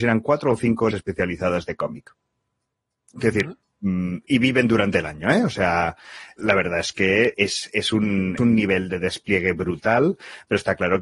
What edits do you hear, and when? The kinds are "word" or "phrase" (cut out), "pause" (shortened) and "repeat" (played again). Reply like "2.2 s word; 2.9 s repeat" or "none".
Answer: 0.9 s word; 6.4 s word; 7.3 s word; 8.4 s word